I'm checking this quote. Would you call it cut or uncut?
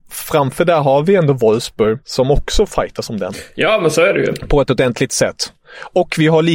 cut